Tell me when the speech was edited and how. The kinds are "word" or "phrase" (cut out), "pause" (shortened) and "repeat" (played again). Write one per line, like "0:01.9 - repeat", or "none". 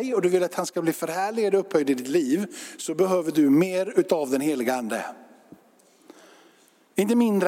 none